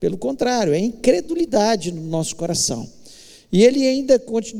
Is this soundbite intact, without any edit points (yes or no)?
yes